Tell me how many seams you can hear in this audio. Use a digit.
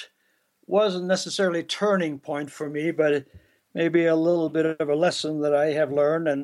0